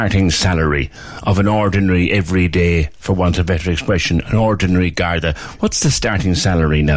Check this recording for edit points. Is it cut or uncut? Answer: uncut